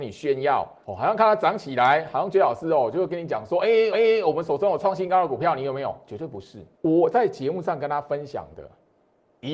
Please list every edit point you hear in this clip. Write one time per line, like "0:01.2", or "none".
0:03.9
0:06.7